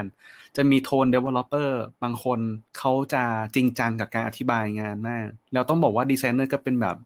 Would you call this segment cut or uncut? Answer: cut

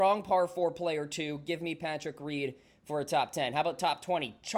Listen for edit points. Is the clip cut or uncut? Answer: uncut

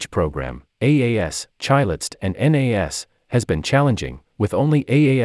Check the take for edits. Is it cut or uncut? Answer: uncut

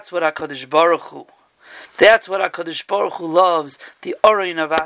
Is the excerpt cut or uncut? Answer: uncut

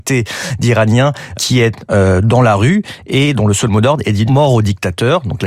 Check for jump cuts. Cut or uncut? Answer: cut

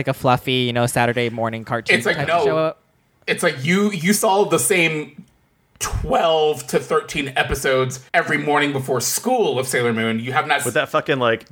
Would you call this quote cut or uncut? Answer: cut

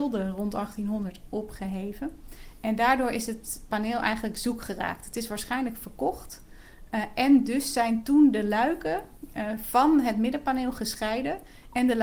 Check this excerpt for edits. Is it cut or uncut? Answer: uncut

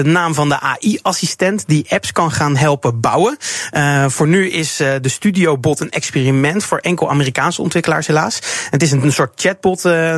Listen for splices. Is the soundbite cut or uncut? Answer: uncut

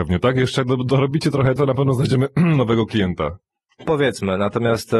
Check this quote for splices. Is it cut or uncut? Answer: cut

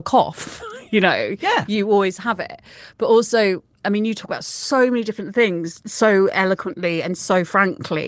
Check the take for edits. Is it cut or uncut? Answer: uncut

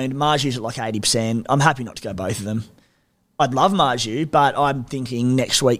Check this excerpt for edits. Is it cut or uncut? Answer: uncut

